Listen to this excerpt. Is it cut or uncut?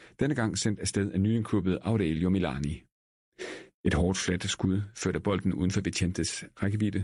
uncut